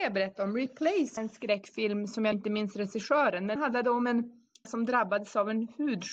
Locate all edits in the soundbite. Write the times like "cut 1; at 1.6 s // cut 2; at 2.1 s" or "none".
cut 1; at 1.2 s // cut 2; at 2.3 s // cut 3; at 3.6 s // cut 4; at 4.7 s